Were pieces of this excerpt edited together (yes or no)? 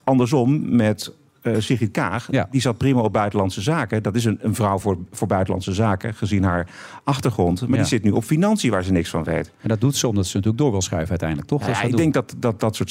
no